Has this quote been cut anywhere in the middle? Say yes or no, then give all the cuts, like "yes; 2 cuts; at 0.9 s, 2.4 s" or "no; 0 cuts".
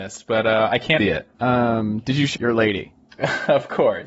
yes; 3 cuts; at 1.0 s, 1.3 s, 2.4 s